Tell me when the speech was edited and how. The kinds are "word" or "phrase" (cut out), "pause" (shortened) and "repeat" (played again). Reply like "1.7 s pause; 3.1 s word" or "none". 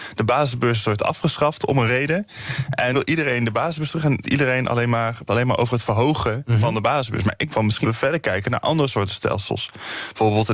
2.9 s word; 4.2 s word; 5.3 s word; 7.5 s word; 7.8 s word